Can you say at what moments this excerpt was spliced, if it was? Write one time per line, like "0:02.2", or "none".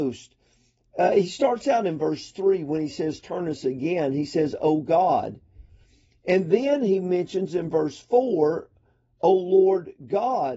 none